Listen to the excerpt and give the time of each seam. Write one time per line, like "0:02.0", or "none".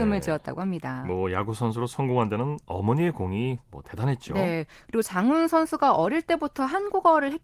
0:03.6